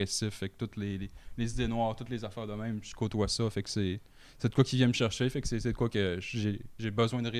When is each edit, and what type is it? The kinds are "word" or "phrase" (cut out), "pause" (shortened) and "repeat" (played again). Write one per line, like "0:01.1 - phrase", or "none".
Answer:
none